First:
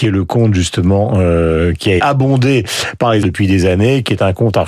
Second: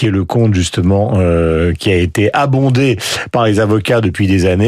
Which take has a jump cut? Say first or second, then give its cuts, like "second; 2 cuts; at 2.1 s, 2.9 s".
first; 2 cuts; at 2.0 s, 3.2 s